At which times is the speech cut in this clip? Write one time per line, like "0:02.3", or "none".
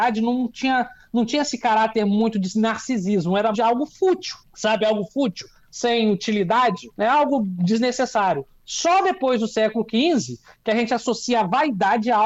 0:03.5
0:04.4
0:06.9

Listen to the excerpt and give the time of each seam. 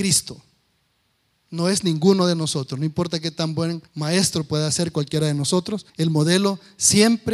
0:03.9
0:05.9

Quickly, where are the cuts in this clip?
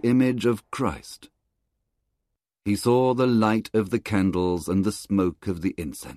none

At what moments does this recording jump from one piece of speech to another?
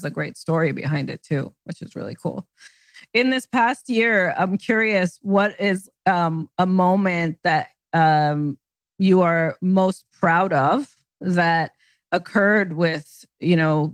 none

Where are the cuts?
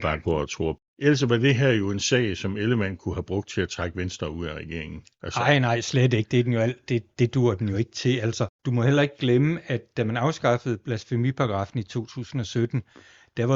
none

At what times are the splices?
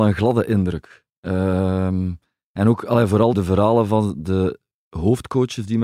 0:03.3

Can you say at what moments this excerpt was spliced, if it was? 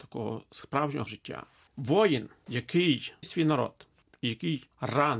0:01.1
0:03.2

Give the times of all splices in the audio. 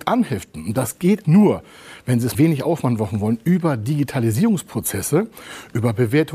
0:01.2
0:02.3

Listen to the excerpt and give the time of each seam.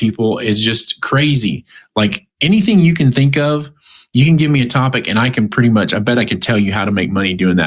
none

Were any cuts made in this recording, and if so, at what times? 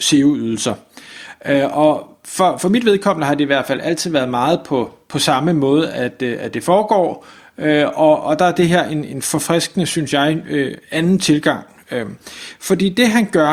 none

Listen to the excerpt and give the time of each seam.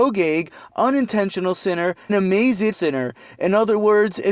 0:02.1
0:02.7

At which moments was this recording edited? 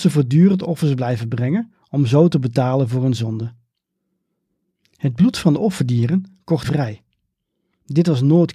0:06.6

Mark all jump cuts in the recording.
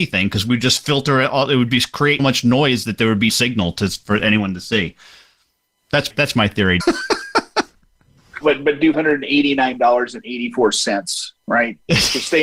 0:02.2
0:03.3
0:06.1
0:06.8
0:08.4
0:08.9

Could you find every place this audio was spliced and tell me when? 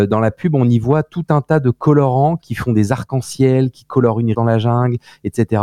0:04.3

